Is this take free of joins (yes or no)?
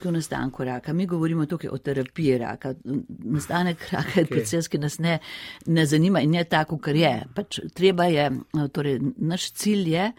yes